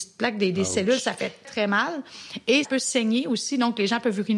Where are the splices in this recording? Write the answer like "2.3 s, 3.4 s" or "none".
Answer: 1.4 s, 2.6 s

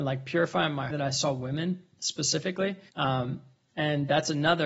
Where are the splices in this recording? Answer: 0.9 s, 2.9 s

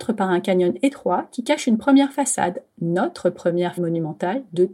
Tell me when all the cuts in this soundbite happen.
3.8 s

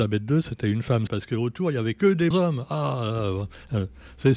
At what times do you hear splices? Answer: 1.1 s, 2.3 s

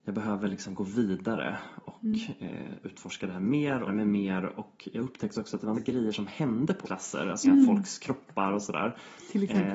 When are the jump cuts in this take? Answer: 3.9 s, 5.7 s, 6.8 s, 7.4 s

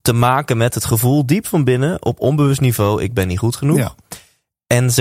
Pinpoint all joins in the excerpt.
none

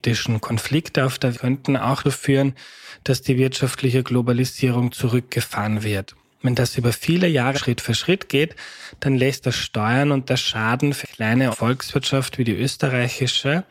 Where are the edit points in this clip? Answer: 1.3 s, 2.0 s, 7.5 s, 9.4 s, 11.0 s, 11.5 s

